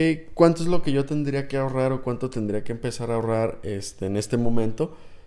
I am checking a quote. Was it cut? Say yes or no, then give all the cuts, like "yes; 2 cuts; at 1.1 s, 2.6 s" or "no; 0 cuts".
no; 0 cuts